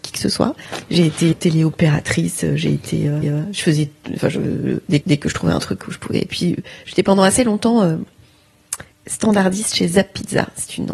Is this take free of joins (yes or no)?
no